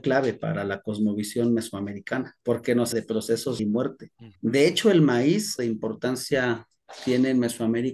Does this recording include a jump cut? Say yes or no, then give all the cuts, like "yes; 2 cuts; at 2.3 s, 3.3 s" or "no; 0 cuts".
yes; 5 cuts; at 2.4 s, 2.9 s, 3.6 s, 4.4 s, 5.6 s